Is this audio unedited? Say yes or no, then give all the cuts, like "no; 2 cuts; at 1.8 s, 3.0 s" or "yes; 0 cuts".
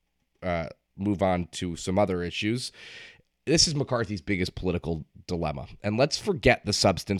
yes; 0 cuts